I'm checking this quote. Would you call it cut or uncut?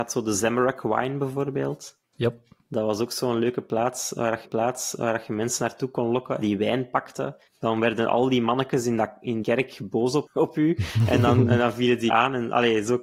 cut